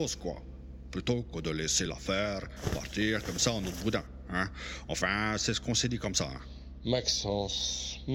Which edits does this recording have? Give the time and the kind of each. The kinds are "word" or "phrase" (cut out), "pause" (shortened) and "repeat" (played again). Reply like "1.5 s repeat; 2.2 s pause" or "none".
none